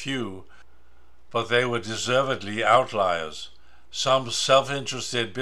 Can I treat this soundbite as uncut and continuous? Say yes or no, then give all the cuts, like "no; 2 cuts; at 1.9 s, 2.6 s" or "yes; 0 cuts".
yes; 0 cuts